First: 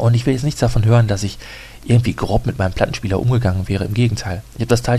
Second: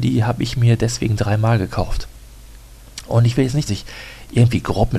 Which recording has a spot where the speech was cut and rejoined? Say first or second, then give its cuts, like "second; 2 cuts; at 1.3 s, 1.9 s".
second; 1 cut; at 3.7 s